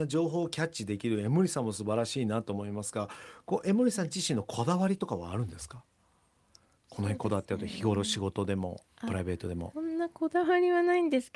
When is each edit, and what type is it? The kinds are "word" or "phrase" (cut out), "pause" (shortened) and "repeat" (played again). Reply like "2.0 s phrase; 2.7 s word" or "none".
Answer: 9.7 s word